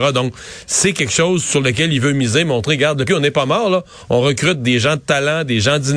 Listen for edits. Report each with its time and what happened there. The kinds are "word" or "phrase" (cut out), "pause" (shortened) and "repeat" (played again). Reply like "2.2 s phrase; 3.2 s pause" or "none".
3.1 s word